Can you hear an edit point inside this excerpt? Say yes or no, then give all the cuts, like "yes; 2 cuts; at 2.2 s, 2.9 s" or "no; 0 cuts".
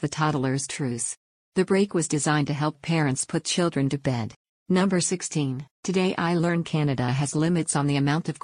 yes; 2 cuts; at 4.4 s, 5.7 s